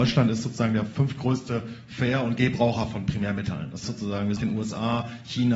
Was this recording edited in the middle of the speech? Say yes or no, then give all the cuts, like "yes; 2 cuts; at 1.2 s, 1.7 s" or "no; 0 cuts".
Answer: yes; 2 cuts; at 3.8 s, 4.4 s